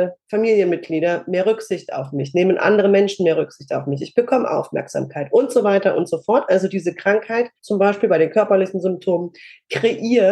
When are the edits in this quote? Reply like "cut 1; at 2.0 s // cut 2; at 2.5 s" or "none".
cut 1; at 7.6 s